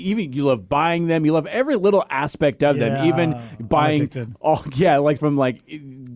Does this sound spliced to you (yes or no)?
yes